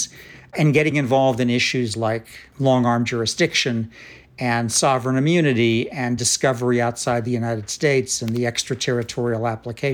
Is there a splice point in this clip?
no; 0 cuts

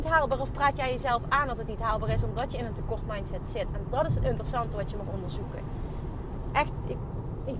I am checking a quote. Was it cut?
no; 0 cuts

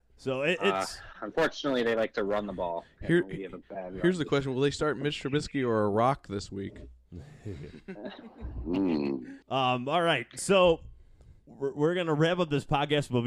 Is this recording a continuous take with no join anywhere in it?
no; 1 cut; at 9.4 s

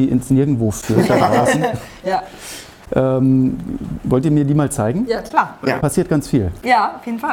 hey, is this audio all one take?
yes; 0 cuts

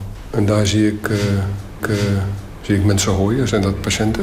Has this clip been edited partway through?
yes; 1 cut; at 1.8 s

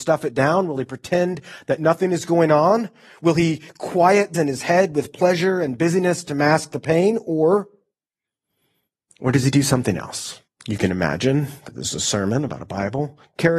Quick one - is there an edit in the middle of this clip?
yes; 2 cuts; at 4.3 s, 10.5 s

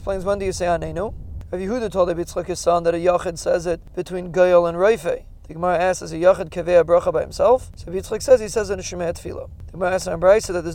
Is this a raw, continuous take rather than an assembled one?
yes; 0 cuts

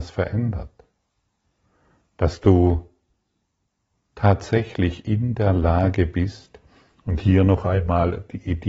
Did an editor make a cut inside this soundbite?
no; 0 cuts

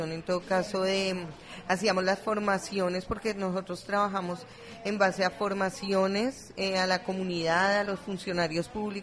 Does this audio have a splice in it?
no; 0 cuts

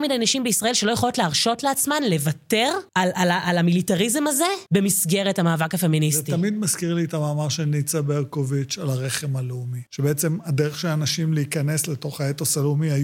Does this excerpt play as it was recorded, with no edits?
no; 3 cuts; at 2.9 s, 4.7 s, 9.9 s

